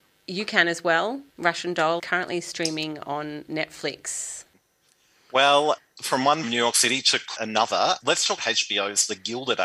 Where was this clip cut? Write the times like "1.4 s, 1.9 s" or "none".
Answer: 1.3 s, 2.0 s, 6.4 s, 7.4 s, 8.0 s, 8.4 s